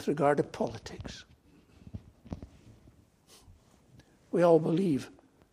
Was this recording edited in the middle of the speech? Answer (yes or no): no